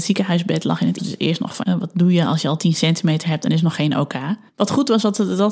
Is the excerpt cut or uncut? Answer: cut